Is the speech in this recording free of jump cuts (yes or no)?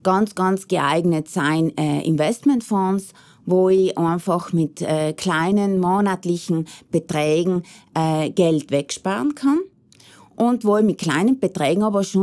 yes